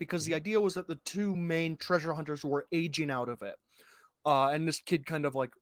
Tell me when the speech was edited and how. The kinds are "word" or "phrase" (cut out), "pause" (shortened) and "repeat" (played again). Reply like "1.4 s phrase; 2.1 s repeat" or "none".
none